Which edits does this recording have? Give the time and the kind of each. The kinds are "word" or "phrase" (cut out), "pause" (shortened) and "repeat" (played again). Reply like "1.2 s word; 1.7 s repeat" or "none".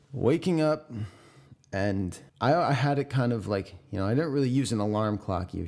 2.3 s pause